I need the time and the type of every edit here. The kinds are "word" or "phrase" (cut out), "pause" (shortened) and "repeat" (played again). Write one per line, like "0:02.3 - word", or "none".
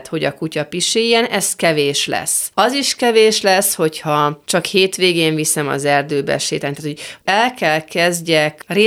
none